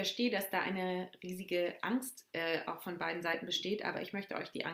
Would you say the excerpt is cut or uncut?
uncut